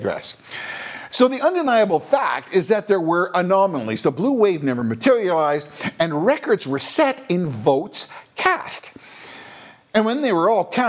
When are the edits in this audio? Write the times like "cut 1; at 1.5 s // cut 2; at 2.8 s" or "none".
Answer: none